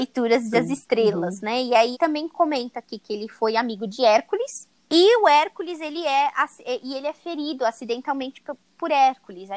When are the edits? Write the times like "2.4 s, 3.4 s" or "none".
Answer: 1.9 s, 4.8 s